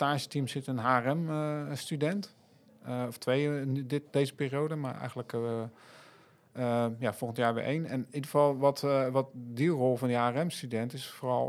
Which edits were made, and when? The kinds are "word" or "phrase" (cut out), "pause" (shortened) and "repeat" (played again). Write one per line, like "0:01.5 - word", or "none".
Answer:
none